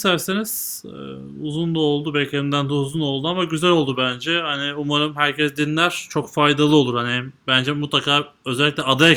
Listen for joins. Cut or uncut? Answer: uncut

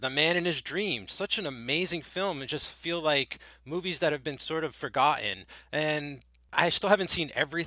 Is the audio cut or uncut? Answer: uncut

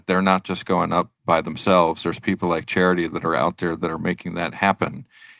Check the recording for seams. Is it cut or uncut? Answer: cut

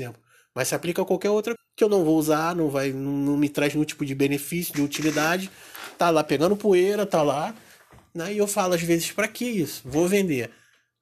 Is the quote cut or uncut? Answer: cut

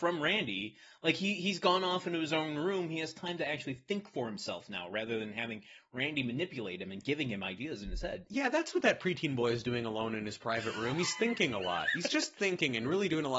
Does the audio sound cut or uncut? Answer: uncut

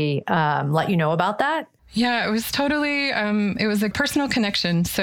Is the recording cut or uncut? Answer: cut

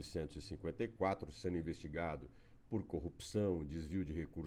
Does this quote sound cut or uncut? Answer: uncut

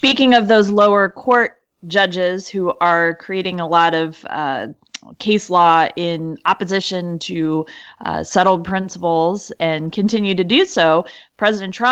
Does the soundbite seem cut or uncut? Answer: uncut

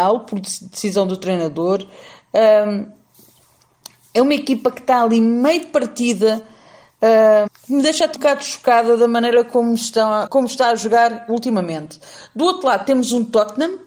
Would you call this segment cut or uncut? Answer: cut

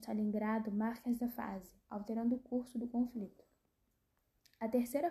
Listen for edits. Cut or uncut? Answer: uncut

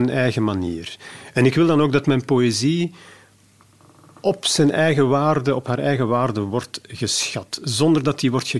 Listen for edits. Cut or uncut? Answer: uncut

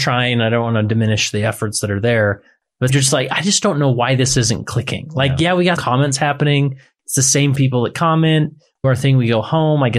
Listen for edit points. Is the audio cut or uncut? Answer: cut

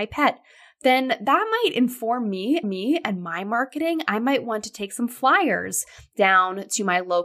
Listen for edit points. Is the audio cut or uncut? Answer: cut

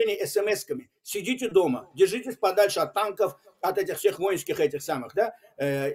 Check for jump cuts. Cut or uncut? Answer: uncut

